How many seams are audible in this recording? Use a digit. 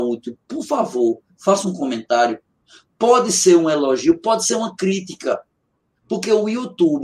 0